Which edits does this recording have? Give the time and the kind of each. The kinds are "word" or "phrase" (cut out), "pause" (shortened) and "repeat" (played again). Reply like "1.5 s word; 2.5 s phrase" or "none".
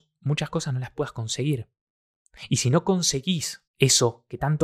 3.7 s pause